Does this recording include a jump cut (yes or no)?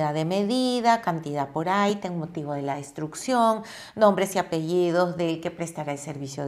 no